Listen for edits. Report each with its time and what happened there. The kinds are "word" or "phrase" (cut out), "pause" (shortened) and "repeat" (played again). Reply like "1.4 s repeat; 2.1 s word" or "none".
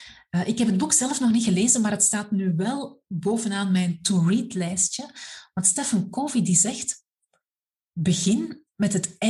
none